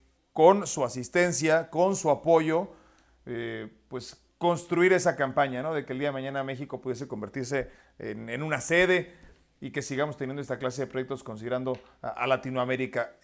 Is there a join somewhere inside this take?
no; 0 cuts

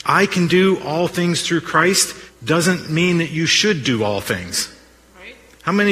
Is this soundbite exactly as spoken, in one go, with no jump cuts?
no; 1 cut; at 2.3 s

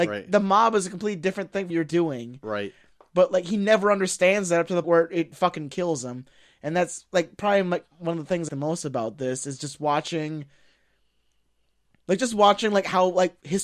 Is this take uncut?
no; 3 cuts; at 1.7 s, 4.8 s, 8.5 s

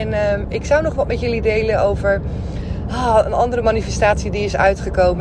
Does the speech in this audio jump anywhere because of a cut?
no; 0 cuts

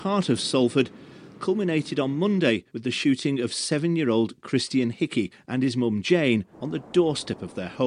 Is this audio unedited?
no; 1 cut; at 6.5 s

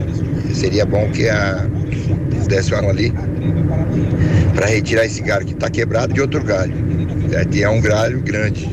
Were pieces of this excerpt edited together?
yes; 3 cuts; at 2.4 s, 2.8 s, 6.1 s

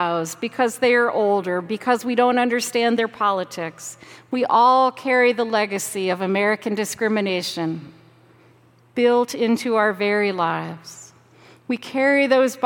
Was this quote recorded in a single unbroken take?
yes; 0 cuts

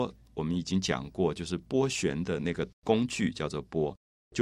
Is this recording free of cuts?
no; 1 cut; at 2.7 s

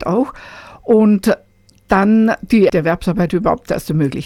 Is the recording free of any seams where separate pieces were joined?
no; 1 cut; at 2.7 s

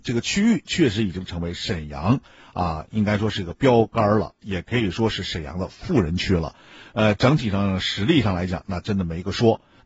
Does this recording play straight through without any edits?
yes; 0 cuts

